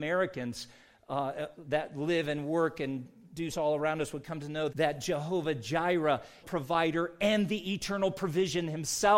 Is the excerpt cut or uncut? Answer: cut